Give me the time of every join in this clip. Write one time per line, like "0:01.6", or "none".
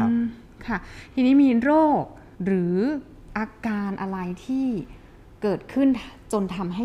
0:02.3